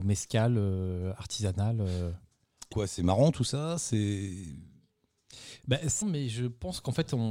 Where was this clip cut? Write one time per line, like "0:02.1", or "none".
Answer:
0:02.7
0:06.0